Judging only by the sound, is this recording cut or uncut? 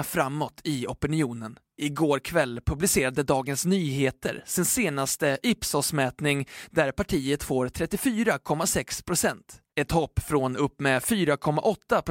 cut